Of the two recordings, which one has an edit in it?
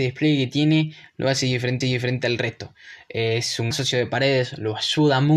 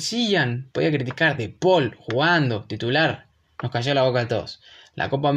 first; 2 cuts; at 1.8 s, 3.7 s

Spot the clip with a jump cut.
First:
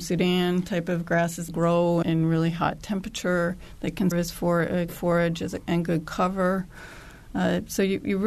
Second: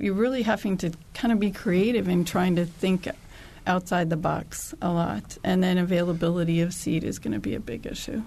first; 4 cuts; at 1.5 s, 2.0 s, 4.1 s, 4.9 s

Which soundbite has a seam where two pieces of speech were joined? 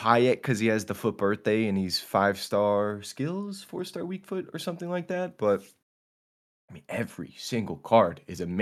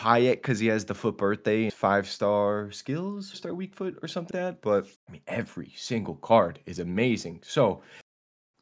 second; 4 cuts; at 1.7 s, 3.3 s, 4.3 s, 5.0 s

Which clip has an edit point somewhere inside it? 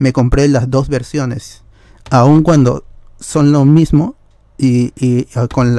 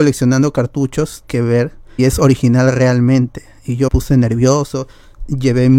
second; 3 cuts; at 1.2 s, 2.0 s, 3.9 s

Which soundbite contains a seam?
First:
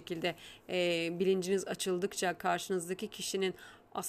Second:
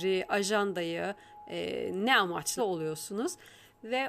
second; 1 cut; at 2.6 s

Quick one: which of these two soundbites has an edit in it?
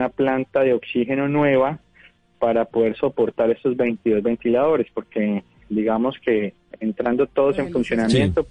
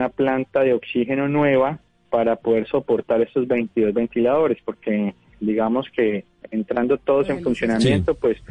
second; 1 cut; at 1.9 s

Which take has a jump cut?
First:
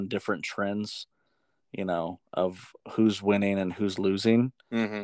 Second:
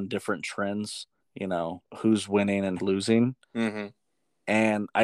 second; 3 cuts; at 1.2 s, 1.8 s, 2.8 s

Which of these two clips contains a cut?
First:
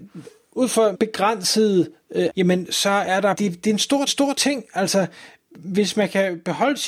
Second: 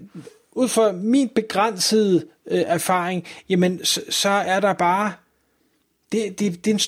first; 5 cuts; at 0.9 s, 2.3 s, 2.7 s, 3.3 s, 4.1 s

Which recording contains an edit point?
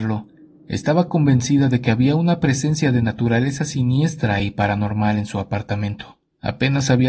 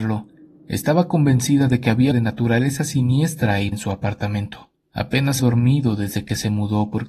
second; 3 cuts; at 2.1 s, 3.7 s, 5.4 s

